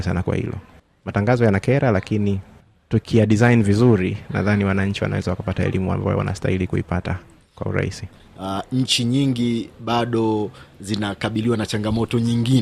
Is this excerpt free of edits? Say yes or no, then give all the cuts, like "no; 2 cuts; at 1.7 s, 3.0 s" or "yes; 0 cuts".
yes; 0 cuts